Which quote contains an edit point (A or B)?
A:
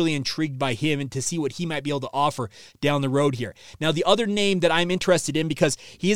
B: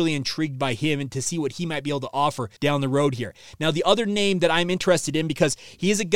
B